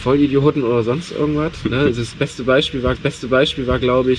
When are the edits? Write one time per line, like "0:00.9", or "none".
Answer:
0:02.9